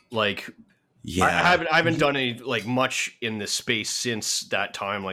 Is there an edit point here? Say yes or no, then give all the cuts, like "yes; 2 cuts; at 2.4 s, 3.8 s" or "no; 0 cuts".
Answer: no; 0 cuts